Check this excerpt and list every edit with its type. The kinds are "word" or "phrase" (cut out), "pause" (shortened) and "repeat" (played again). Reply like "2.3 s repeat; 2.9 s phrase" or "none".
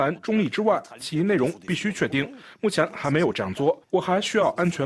3.8 s pause